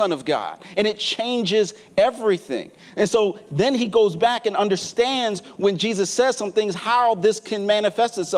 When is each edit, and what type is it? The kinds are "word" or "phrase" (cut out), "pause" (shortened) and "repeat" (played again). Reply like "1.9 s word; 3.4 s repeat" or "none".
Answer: none